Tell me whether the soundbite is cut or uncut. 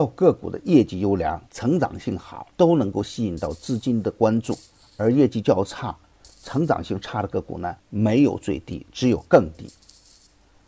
cut